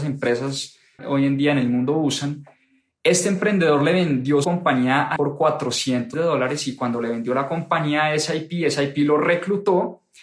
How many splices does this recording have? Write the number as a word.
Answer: four